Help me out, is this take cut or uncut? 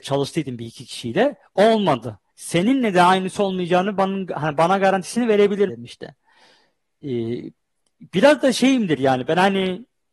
cut